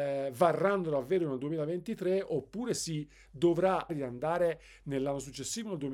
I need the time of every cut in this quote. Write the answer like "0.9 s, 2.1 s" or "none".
3.9 s